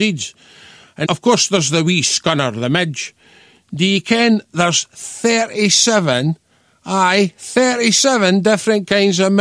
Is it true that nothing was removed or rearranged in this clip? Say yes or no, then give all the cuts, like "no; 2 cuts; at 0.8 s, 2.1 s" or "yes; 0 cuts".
no; 1 cut; at 1.0 s